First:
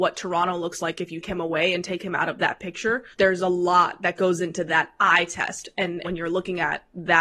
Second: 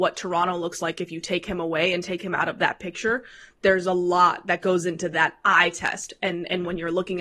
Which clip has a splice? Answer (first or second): first